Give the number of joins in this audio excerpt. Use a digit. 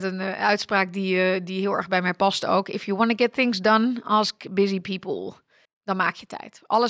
1